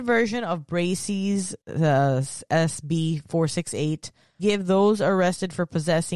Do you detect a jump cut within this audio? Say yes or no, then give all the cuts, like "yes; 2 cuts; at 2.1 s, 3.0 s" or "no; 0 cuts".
yes; 2 cuts; at 1.6 s, 4.4 s